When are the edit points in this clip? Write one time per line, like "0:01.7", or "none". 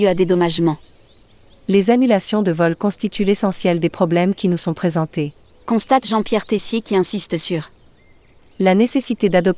none

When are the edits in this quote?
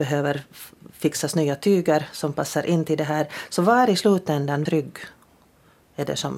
0:04.7

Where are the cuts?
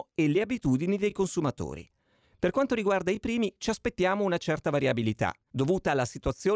none

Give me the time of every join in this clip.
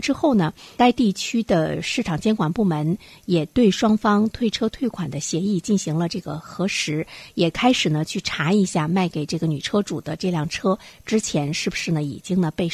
none

